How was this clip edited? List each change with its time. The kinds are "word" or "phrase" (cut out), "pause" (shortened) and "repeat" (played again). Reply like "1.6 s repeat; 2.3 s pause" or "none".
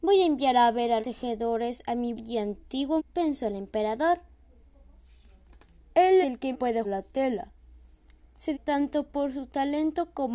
1.0 s word; 2.1 s word; 3.0 s word; 6.2 s word; 6.5 s word; 6.8 s word; 8.5 s word

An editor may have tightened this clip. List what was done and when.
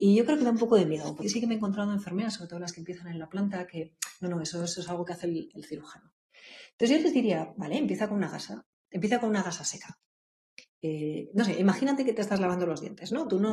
1.2 s word

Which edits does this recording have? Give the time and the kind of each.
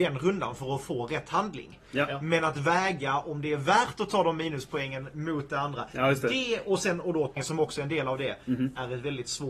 7.4 s word

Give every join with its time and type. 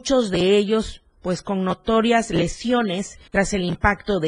3.3 s pause

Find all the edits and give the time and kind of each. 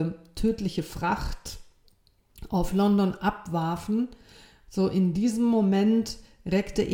none

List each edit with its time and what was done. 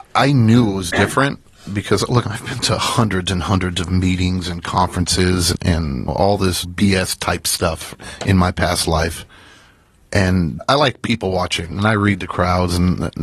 none

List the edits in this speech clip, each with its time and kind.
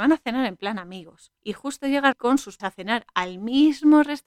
1.4 s pause; 2.1 s word; 2.6 s word

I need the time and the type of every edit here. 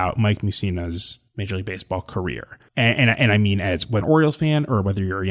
1.3 s pause; 4.0 s word

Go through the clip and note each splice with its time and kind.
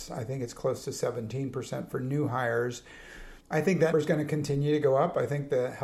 3.4 s pause; 3.9 s word

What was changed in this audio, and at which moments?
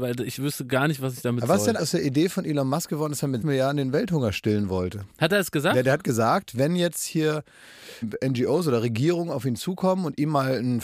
1.8 s word; 3.4 s word; 5.1 s pause; 8.0 s word

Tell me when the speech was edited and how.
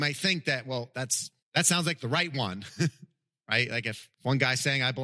1.4 s pause; 4.1 s pause

